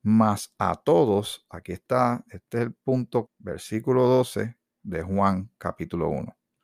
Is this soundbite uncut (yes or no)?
no